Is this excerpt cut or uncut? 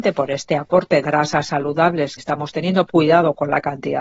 cut